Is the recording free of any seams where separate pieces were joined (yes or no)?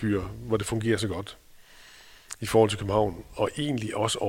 yes